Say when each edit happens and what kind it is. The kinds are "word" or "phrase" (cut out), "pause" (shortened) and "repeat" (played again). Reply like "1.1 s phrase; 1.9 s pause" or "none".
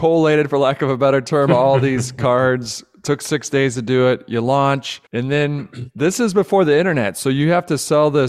5.1 s pause